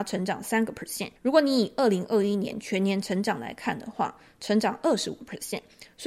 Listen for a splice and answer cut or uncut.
cut